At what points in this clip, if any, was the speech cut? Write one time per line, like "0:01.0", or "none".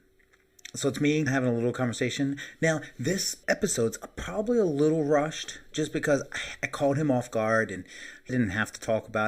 0:01.3
0:03.4
0:08.3